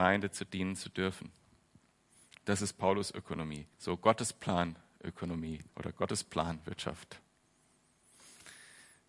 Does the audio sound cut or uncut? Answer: cut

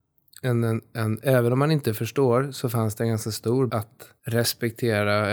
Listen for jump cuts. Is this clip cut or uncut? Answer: cut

